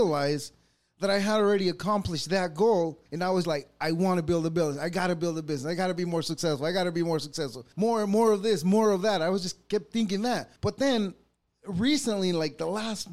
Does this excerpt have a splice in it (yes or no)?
yes